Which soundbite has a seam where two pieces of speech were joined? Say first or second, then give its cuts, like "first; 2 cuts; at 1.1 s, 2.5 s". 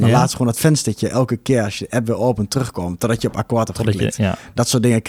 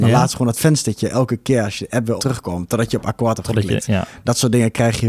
second; 1 cut; at 2.2 s